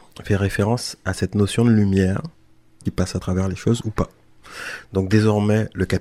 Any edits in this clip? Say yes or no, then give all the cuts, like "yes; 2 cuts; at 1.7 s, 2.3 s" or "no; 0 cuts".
no; 0 cuts